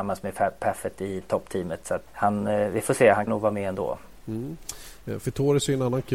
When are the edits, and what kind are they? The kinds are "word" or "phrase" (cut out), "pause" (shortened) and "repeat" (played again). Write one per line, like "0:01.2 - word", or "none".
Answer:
0:02.1 - word
0:03.3 - phrase